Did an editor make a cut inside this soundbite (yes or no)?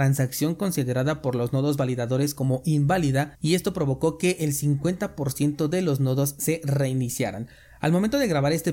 no